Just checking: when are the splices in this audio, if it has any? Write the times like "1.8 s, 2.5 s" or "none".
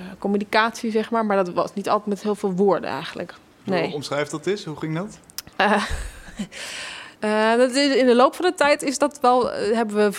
5.5 s, 7.2 s